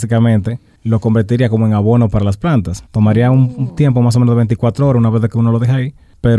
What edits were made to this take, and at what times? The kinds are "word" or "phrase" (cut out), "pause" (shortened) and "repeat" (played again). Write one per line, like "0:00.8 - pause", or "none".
0:02.9 - pause